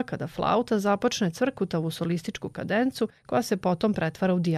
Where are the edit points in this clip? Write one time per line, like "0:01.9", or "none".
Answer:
0:03.2

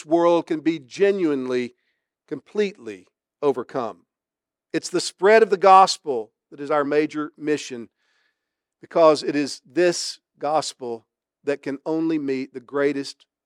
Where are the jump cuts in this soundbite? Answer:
none

